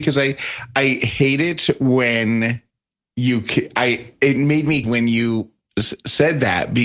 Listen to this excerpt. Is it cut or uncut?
cut